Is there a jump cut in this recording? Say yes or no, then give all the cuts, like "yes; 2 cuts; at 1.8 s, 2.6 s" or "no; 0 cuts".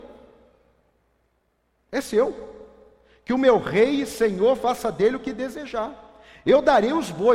no; 0 cuts